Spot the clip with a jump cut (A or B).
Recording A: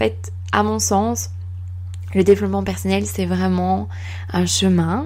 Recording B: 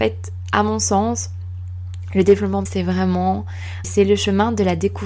B